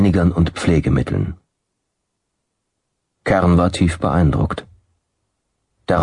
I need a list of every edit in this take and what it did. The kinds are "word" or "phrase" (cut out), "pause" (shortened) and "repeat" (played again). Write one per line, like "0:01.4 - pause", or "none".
none